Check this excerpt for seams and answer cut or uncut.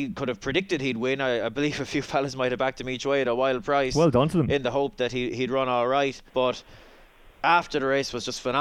cut